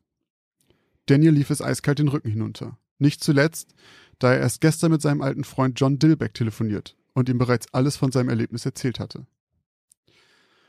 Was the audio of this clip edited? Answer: no; 0 cuts

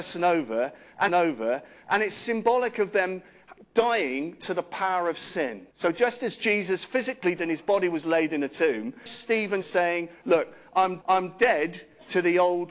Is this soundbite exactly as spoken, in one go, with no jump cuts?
no; 6 cuts; at 1.1 s, 5.7 s, 7.4 s, 9.1 s, 9.6 s, 11.0 s

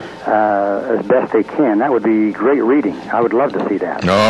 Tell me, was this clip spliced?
no; 0 cuts

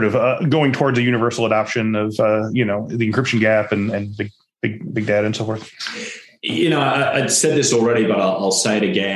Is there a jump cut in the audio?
no; 0 cuts

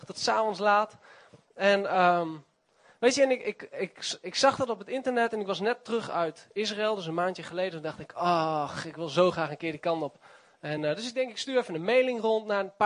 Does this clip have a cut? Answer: no; 0 cuts

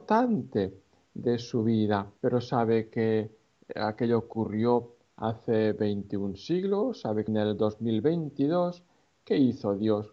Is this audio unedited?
no; 2 cuts; at 2.2 s, 7.3 s

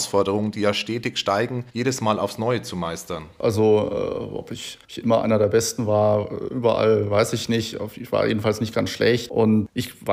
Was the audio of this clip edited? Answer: yes; 2 cuts; at 1.7 s, 4.8 s

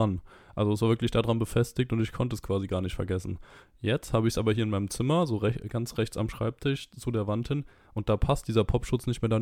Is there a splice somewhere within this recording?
no; 0 cuts

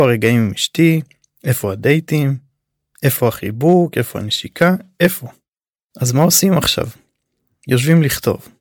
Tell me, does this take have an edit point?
no; 0 cuts

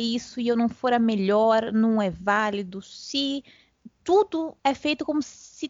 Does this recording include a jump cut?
yes; 1 cut; at 4.6 s

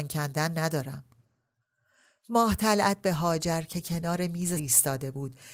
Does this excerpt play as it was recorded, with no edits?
no; 1 cut; at 4.6 s

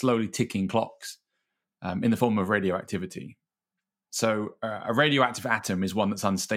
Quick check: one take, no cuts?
yes; 0 cuts

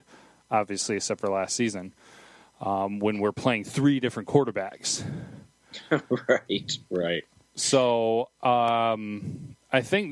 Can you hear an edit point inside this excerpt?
no; 0 cuts

